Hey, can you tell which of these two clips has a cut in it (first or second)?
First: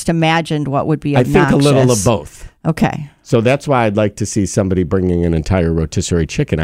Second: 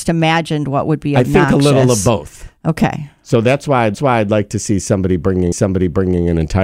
second